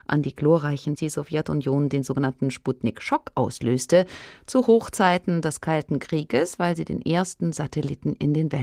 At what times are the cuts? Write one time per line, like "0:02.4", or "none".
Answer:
0:01.0